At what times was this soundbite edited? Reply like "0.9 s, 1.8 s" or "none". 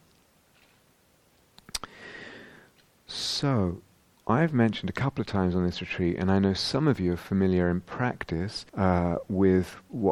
8.7 s